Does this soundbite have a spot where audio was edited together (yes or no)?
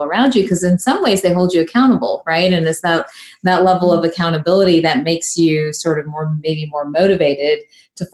no